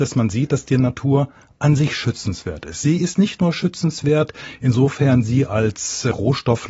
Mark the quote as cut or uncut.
uncut